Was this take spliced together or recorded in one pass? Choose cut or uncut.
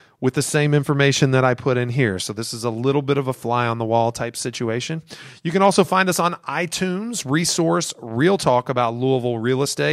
uncut